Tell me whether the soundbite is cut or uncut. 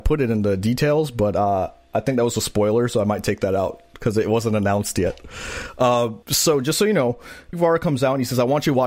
cut